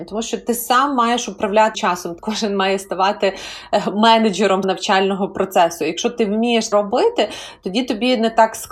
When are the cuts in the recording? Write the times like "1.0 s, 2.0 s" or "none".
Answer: 1.7 s, 2.2 s, 4.6 s, 6.7 s